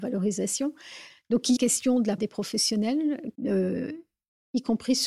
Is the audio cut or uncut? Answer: cut